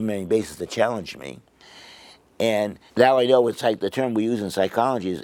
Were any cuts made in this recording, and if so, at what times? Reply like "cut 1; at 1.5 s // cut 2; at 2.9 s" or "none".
cut 1; at 2.9 s